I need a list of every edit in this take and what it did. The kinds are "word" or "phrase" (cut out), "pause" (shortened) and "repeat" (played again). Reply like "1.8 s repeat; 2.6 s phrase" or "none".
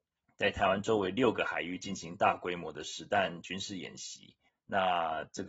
4.5 s pause

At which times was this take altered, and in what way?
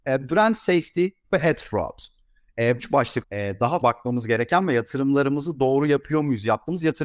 1.2 s word; 2.8 s word; 3.2 s word; 3.8 s word

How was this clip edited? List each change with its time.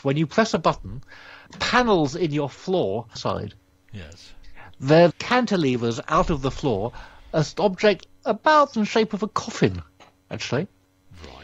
1.5 s pause; 3.2 s phrase; 5.1 s word; 8.7 s phrase

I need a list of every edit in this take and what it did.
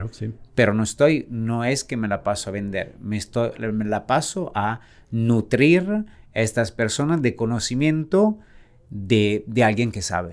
none

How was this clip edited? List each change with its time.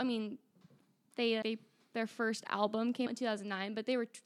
1.4 s word; 3.1 s word

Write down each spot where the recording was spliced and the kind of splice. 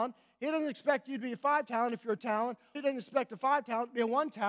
2.2 s word; 2.7 s word

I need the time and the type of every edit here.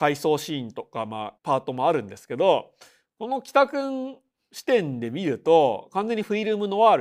1.4 s pause

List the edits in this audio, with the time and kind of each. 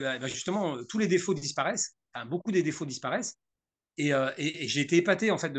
none

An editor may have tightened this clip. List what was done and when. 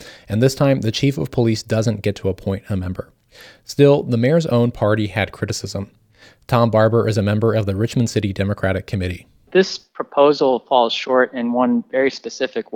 none

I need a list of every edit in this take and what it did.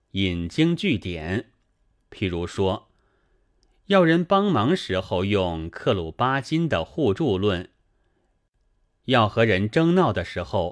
none

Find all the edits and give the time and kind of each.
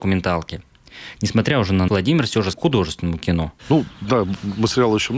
1.9 s word; 2.5 s word; 3.6 s pause

